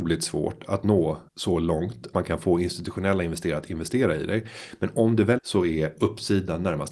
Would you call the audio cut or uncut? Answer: cut